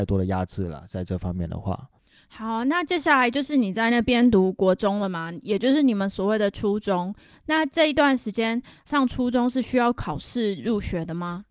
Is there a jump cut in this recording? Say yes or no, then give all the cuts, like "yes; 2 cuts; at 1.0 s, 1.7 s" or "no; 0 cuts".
yes; 1 cut; at 8.9 s